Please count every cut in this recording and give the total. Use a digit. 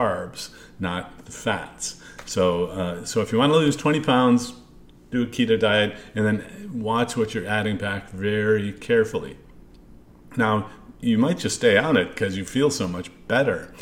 0